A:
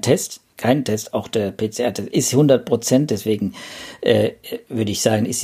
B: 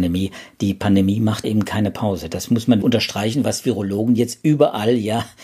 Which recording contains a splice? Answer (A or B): B